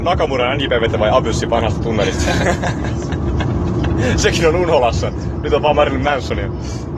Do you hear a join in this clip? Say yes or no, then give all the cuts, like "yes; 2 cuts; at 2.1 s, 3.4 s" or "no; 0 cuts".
yes; 2 cuts; at 0.9 s, 5.7 s